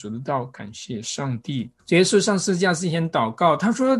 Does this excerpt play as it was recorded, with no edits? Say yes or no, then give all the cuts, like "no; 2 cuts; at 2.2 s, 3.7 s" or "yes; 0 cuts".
no; 1 cut; at 1.8 s